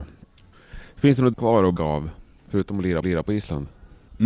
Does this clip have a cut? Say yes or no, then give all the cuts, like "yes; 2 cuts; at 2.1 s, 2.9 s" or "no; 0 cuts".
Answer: yes; 3 cuts; at 1.3 s, 1.8 s, 3.0 s